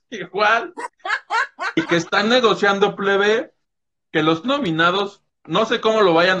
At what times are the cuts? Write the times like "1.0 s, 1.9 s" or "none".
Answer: 4.4 s